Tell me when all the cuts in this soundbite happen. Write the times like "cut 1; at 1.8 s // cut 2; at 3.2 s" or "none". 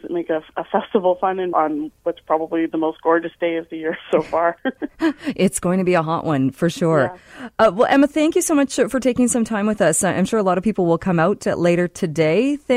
cut 1; at 1.5 s